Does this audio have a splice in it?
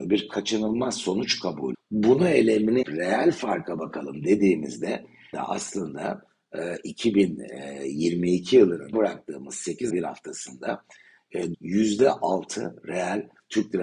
yes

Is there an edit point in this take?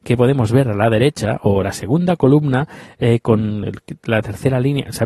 no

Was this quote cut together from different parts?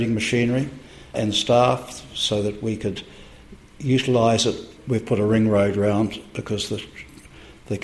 no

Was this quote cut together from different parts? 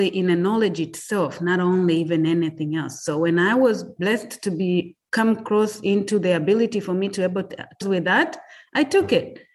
yes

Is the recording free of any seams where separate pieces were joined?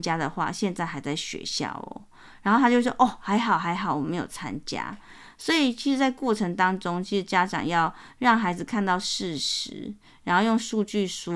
yes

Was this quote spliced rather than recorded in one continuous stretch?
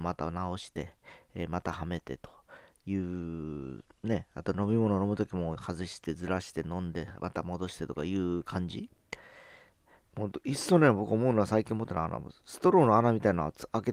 no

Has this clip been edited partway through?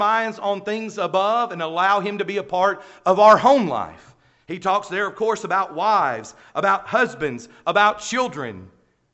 no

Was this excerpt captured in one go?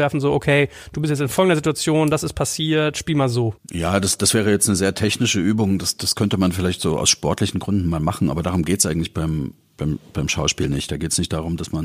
no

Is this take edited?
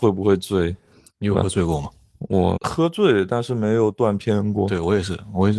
yes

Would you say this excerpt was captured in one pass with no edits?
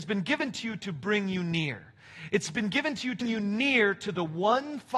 no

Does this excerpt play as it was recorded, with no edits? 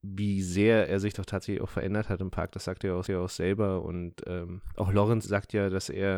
no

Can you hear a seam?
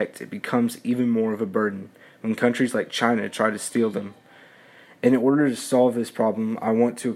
no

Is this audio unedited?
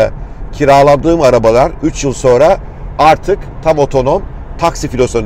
yes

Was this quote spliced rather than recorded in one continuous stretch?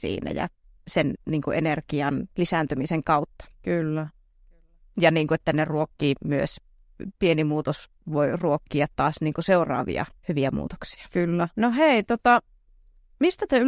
yes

